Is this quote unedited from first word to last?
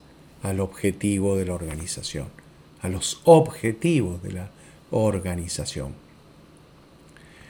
yes; 0 cuts

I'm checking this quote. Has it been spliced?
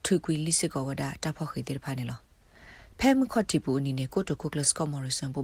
no; 0 cuts

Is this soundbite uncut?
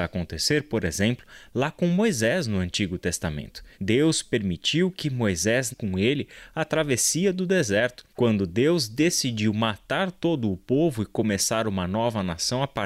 no; 3 cuts; at 3.7 s, 5.7 s, 8.1 s

